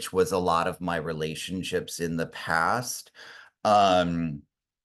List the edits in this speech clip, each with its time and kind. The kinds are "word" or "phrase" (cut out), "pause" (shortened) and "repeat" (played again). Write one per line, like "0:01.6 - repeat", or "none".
none